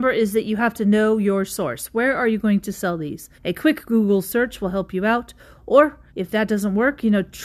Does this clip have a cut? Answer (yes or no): yes